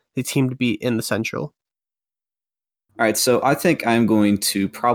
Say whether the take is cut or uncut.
uncut